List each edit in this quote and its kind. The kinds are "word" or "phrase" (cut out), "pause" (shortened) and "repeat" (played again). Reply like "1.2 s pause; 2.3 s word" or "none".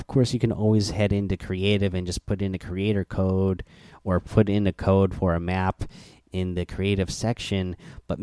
none